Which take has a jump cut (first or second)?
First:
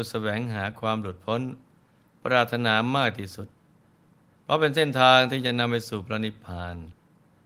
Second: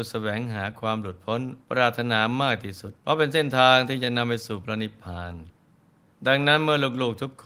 second